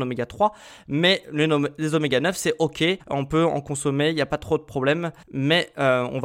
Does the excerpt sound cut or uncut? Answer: cut